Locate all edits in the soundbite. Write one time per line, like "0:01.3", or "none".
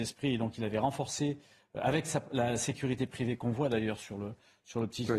none